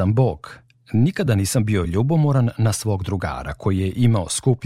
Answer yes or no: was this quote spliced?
no